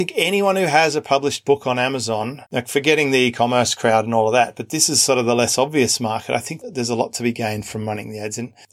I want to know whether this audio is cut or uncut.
cut